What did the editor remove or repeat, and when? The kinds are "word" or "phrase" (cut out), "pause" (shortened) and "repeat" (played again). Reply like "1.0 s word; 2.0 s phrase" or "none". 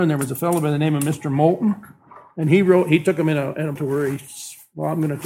3.8 s phrase

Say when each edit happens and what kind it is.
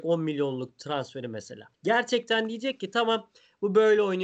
1.7 s pause

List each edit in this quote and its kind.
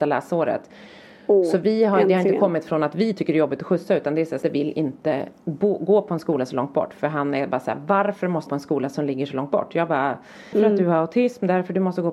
4.4 s word; 5.4 s pause; 8.5 s phrase; 10.5 s word

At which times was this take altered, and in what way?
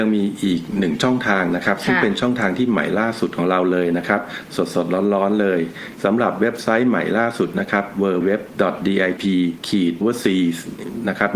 8.2 s word; 9.2 s word; 10.0 s word

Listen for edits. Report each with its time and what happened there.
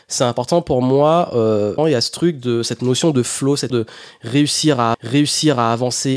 1.8 s word; 3.7 s word; 4.9 s repeat

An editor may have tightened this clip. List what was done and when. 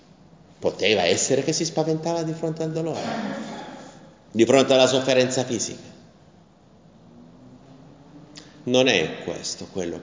none

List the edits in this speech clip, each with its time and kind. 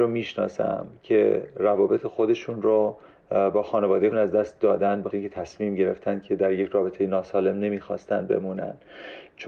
4.1 s word; 5.1 s word

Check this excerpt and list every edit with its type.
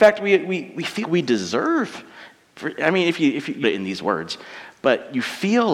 1.0 s word; 3.6 s phrase

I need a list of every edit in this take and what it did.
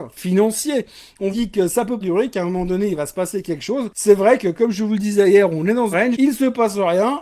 1.3 s word; 2.0 s word; 5.9 s word

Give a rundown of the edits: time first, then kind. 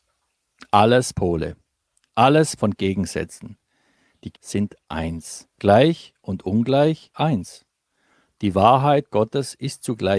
1.1 s word; 2.6 s phrase; 4.3 s word; 5.5 s pause; 7.1 s word

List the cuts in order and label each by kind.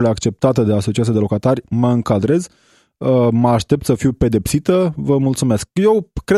none

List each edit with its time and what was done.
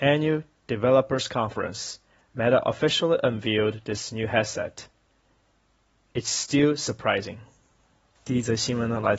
none

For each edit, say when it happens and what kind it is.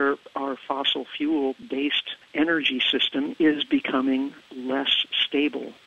none

